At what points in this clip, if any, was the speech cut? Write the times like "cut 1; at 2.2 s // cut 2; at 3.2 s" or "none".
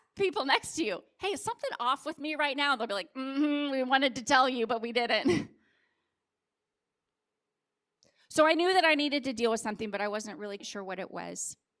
cut 1; at 10.6 s